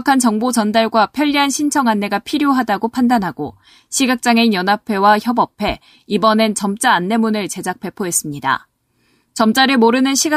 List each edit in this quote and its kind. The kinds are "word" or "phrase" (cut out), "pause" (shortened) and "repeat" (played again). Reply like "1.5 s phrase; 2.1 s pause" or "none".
none